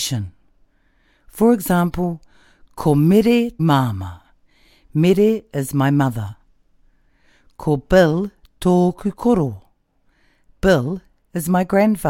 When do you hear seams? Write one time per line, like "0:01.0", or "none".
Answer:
0:03.6